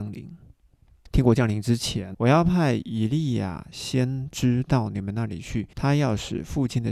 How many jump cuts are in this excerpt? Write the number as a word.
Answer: two